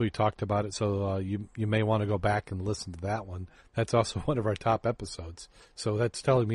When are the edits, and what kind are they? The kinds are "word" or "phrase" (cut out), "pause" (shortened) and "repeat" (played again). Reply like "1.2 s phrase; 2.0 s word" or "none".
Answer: none